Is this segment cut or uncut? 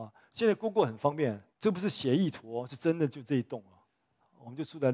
cut